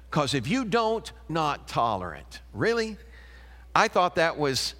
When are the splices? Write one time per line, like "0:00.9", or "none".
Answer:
0:01.3